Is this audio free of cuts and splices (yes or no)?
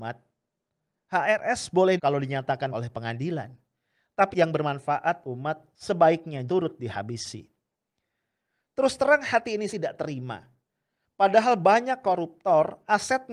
no